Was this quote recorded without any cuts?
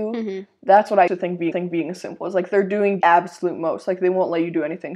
no; 3 cuts; at 1.1 s, 1.5 s, 3.0 s

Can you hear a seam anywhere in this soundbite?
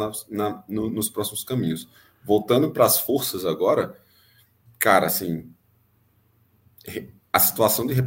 no; 0 cuts

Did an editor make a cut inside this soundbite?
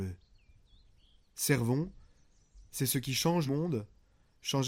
yes; 1 cut; at 3.5 s

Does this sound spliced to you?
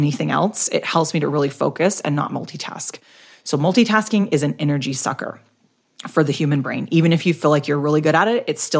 no; 0 cuts

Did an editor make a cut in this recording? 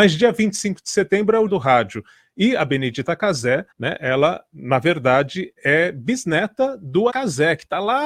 yes; 3 cuts; at 1.5 s, 3.7 s, 7.1 s

